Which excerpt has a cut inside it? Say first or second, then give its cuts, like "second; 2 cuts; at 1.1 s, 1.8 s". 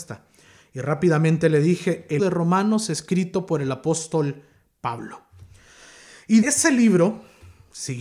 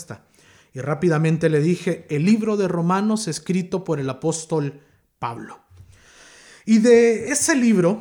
first; 2 cuts; at 2.2 s, 6.4 s